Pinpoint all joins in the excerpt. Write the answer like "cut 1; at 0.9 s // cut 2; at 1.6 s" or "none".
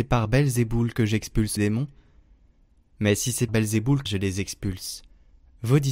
cut 1; at 1.6 s // cut 2; at 3.5 s // cut 3; at 4.1 s